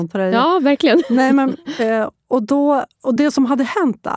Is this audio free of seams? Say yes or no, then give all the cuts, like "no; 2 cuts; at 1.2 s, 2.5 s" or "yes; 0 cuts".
yes; 0 cuts